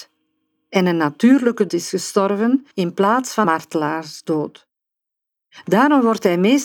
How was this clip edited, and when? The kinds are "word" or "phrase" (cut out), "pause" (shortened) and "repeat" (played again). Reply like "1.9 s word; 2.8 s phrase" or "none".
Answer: 1.7 s word; 2.7 s pause; 3.4 s word